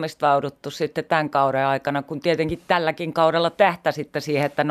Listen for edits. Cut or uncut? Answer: uncut